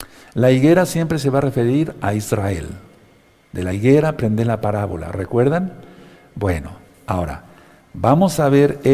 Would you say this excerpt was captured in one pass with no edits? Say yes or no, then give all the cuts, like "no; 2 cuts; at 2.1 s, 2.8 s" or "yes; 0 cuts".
yes; 0 cuts